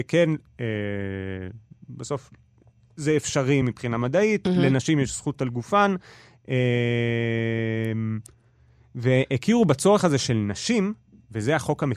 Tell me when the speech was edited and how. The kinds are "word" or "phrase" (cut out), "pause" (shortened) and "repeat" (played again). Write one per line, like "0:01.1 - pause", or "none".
none